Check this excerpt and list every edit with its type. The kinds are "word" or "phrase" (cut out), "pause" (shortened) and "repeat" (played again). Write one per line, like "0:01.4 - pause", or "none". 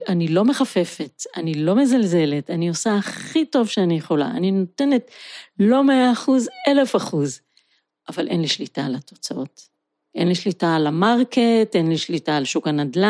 none